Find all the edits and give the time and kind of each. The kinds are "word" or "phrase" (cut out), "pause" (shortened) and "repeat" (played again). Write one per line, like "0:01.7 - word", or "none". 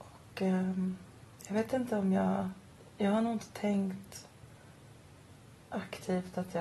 none